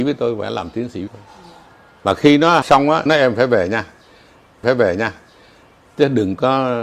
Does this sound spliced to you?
yes; 4 cuts; at 1.1 s, 2.6 s, 3.1 s, 4.6 s

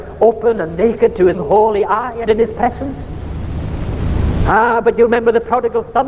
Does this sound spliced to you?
yes; 2 cuts; at 1.3 s, 2.3 s

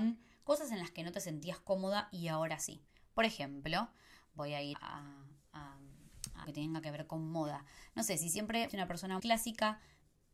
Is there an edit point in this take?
yes; 4 cuts; at 4.7 s, 6.4 s, 8.7 s, 9.2 s

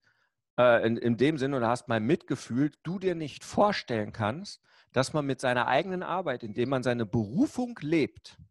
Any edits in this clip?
yes; 1 cut; at 2.8 s

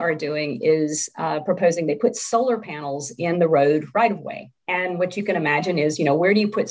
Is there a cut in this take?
yes; 1 cut; at 4.6 s

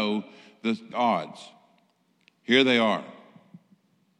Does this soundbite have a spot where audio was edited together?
yes; 1 cut; at 0.9 s

